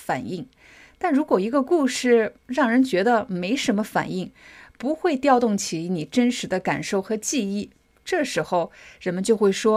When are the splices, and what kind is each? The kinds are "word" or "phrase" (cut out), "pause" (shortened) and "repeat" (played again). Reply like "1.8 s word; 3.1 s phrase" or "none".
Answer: 2.4 s pause

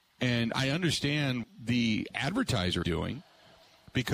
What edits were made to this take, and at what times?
1.4 s word; 2.8 s word

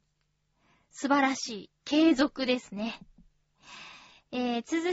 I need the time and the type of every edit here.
1.8 s pause

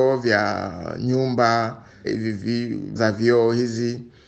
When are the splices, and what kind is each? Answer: 2.0 s word; 3.0 s word

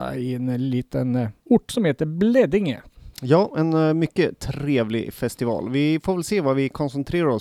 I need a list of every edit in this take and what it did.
1.4 s pause; 3.1 s pause

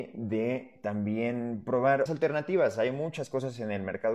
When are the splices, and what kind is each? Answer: 2.1 s word

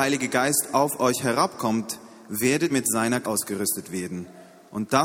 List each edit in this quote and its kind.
2.7 s word; 3.2 s word

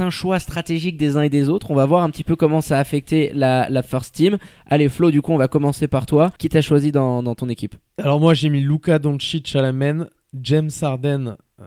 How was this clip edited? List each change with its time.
6.4 s pause

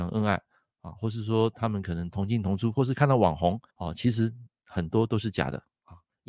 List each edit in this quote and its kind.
3.7 s pause

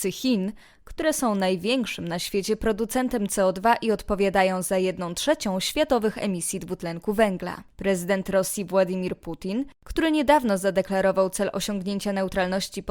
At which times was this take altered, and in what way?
7.7 s pause; 9.7 s pause

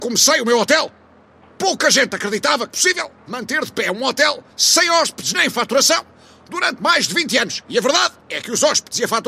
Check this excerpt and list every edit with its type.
2.7 s word; 4.5 s pause; 8.2 s pause

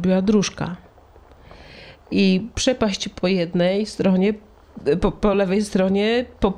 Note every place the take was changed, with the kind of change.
none

